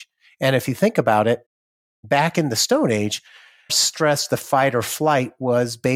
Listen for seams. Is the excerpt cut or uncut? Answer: cut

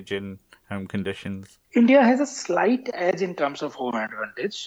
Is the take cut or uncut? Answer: cut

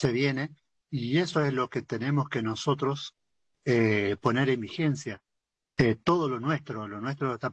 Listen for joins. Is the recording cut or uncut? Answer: uncut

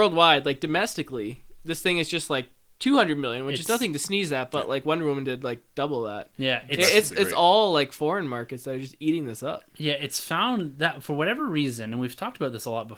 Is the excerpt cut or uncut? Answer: uncut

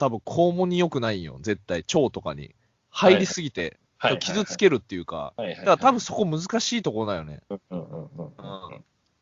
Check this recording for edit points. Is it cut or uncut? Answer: uncut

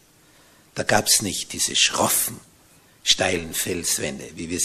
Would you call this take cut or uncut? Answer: uncut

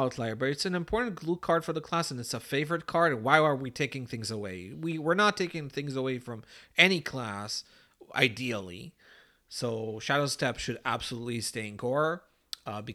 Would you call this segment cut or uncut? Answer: uncut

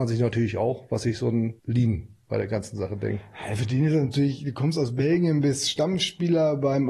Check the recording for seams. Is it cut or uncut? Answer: cut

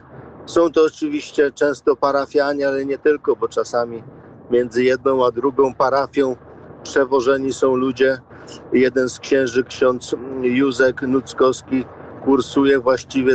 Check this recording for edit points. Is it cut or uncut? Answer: uncut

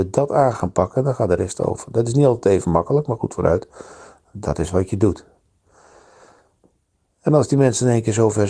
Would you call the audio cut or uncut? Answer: uncut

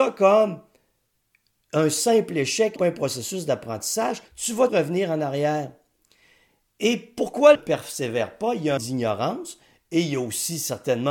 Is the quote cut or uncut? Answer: cut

